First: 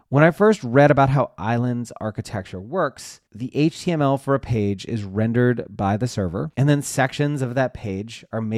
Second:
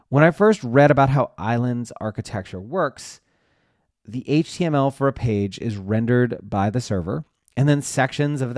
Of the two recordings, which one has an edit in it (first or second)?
first